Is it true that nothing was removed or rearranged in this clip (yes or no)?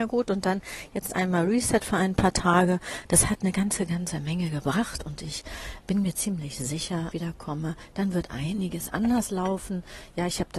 no